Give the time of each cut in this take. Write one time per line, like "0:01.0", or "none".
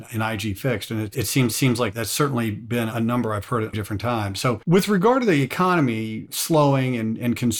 0:01.5
0:03.7
0:04.6